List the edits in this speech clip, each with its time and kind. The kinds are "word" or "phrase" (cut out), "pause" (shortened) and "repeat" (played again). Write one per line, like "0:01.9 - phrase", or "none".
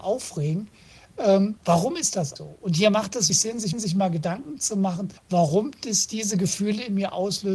0:01.6 - pause
0:02.4 - word
0:03.3 - word
0:03.7 - repeat
0:05.2 - pause

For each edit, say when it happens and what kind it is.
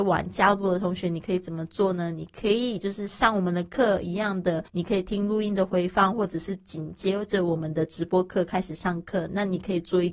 0:04.7 - pause

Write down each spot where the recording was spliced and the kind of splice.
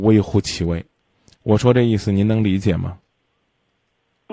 none

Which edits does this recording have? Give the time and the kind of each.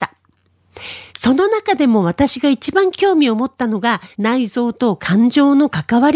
0:01.1 - pause
0:04.1 - pause

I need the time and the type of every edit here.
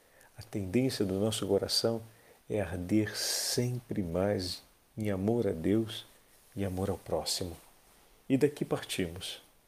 none

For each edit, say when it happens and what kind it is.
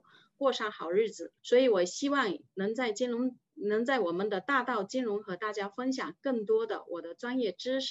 0:01.4 - pause

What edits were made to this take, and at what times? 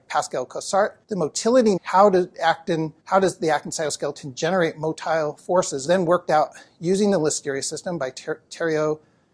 0:01.0 - pause
0:01.8 - word
0:03.0 - pause
0:05.9 - phrase

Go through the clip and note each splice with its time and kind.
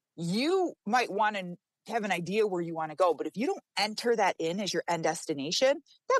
none

